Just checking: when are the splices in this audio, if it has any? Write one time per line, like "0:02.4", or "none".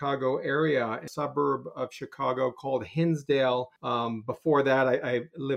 0:01.1
0:03.8